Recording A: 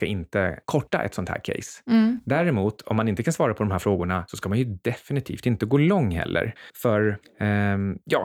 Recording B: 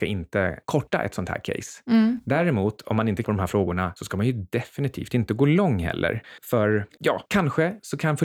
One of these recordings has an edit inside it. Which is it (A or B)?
B